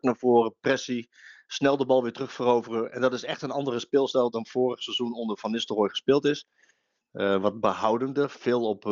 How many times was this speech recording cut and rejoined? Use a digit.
0